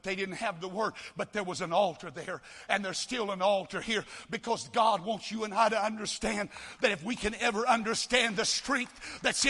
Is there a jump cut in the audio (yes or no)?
no